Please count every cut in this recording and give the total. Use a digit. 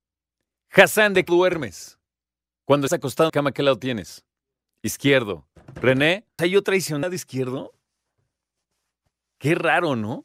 5